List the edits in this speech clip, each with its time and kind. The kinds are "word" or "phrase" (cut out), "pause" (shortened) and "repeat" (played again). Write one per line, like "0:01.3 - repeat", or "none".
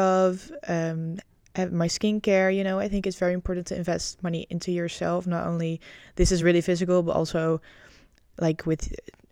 none